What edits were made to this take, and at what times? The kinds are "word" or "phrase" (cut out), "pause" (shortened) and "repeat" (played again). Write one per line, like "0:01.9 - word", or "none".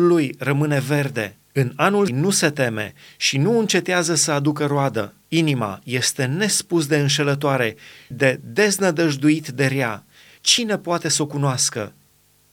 0:01.4 - pause
0:02.1 - word
0:05.2 - pause
0:08.1 - word